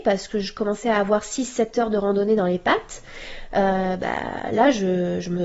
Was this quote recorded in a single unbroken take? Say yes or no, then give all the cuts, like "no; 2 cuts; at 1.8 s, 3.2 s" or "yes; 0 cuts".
yes; 0 cuts